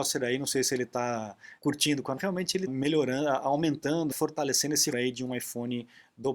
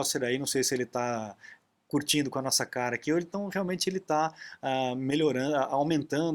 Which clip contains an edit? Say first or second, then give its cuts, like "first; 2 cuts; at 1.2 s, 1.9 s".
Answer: first; 5 cuts; at 1.6 s, 2.2 s, 2.7 s, 4.1 s, 4.9 s